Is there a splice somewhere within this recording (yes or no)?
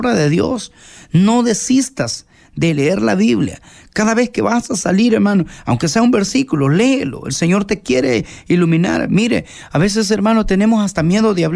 no